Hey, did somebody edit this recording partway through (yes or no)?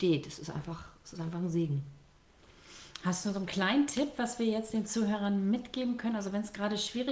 no